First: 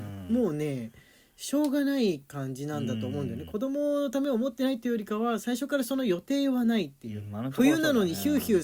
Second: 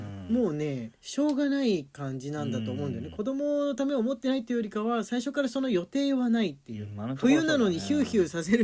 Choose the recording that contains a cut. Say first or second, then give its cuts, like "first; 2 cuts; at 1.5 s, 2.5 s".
second; 1 cut; at 0.9 s